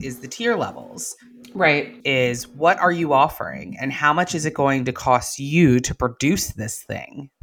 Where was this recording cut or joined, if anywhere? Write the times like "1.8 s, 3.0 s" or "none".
2.0 s